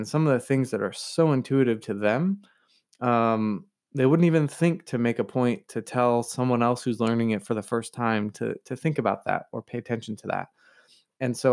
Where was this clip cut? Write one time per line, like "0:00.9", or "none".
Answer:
none